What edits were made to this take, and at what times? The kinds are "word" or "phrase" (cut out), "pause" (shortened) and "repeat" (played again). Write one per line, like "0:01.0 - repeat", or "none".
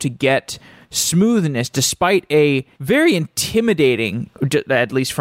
0:02.7 - pause